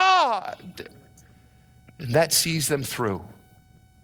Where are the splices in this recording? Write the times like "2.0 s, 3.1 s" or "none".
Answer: none